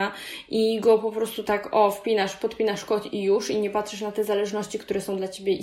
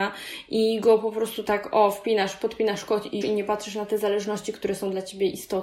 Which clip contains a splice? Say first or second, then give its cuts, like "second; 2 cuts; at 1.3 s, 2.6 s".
second; 1 cut; at 3.2 s